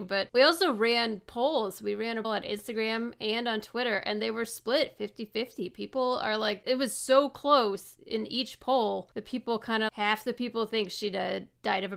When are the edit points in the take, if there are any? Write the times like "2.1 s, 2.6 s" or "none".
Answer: 2.2 s, 6.6 s, 9.9 s

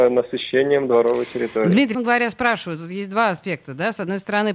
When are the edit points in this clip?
1.9 s

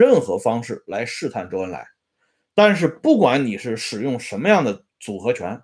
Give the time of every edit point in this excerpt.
none

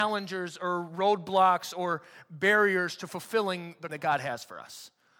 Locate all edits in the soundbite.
3.9 s

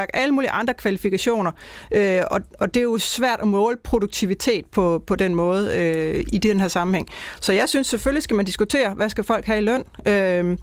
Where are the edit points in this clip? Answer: none

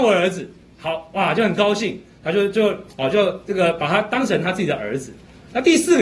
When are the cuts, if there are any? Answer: 2.9 s

